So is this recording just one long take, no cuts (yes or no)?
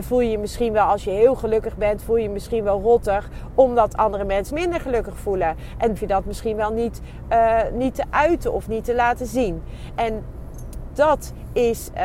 no